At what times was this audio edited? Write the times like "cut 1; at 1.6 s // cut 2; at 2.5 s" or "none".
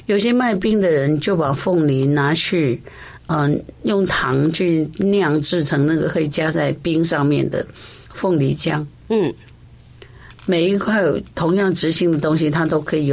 cut 1; at 8.1 s